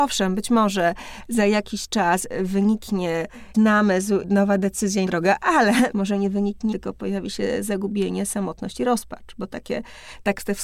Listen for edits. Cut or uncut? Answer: cut